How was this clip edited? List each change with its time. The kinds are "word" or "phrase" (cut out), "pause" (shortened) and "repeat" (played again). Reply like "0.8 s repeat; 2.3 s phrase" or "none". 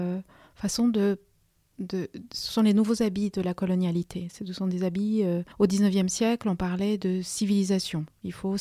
5.5 s pause